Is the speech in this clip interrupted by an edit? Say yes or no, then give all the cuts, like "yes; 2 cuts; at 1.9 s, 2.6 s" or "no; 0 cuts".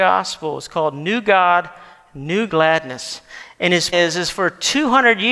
yes; 2 cuts; at 2.5 s, 3.9 s